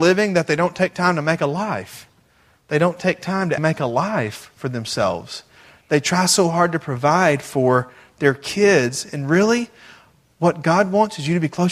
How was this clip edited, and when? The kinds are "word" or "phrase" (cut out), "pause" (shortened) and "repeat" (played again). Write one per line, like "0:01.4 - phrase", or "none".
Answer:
0:03.6 - word